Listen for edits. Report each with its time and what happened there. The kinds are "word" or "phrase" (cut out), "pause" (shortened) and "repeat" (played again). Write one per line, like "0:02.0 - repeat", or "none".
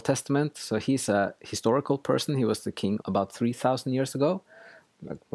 0:03.0 - phrase